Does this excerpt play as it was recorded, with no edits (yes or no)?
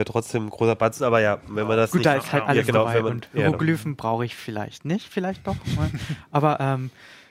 yes